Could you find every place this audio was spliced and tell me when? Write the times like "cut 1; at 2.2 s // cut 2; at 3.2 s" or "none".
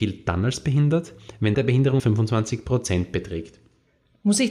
cut 1; at 1.5 s // cut 2; at 2.0 s